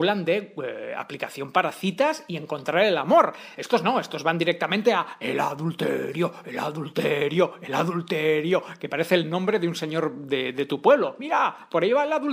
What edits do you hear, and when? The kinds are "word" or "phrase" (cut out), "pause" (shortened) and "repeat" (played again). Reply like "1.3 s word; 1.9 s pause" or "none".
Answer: none